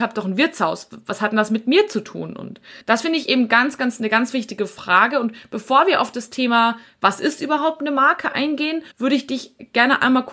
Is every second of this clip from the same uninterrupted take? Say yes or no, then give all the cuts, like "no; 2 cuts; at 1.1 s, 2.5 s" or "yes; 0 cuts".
no; 2 cuts; at 2.8 s, 8.9 s